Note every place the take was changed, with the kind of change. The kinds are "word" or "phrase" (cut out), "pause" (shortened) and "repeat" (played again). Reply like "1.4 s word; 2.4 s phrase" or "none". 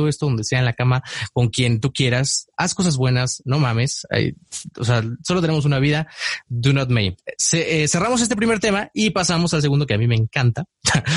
none